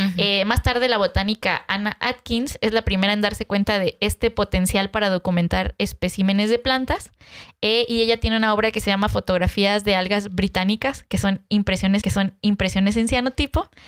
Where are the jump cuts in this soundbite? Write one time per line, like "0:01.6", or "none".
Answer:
0:12.0